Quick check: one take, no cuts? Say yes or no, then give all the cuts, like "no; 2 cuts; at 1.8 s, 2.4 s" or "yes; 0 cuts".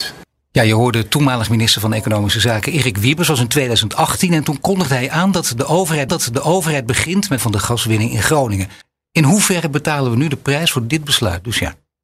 no; 3 cuts; at 6.1 s, 7.4 s, 8.8 s